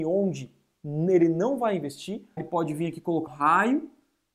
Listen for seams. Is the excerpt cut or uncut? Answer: cut